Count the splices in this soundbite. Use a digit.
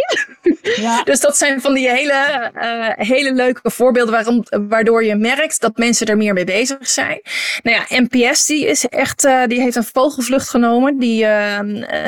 0